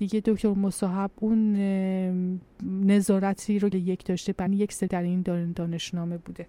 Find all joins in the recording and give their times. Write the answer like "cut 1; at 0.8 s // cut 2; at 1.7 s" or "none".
cut 1; at 3.7 s // cut 2; at 4.5 s // cut 3; at 4.9 s